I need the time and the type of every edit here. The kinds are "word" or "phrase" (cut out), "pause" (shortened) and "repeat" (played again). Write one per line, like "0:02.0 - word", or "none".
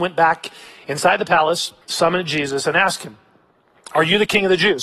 0:01.8 - pause